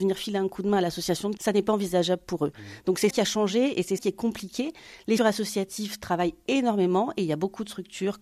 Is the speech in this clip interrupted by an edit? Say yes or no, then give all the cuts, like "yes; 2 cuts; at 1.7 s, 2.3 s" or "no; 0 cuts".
yes; 4 cuts; at 1.4 s, 3.1 s, 4.0 s, 5.2 s